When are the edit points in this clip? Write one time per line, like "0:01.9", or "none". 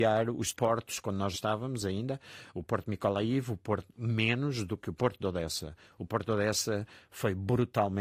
0:01.3